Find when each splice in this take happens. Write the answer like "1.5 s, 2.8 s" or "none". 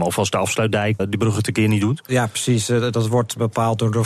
1.0 s